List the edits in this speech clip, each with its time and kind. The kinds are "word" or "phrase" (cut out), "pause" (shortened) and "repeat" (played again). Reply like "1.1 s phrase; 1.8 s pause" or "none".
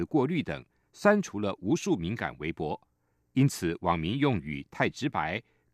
none